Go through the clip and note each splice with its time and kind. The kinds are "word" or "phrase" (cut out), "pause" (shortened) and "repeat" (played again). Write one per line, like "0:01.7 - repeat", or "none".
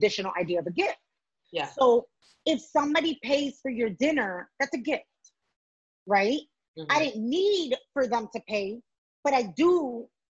none